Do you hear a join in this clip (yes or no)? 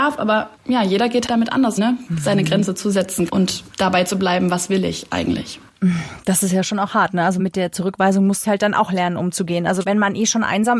yes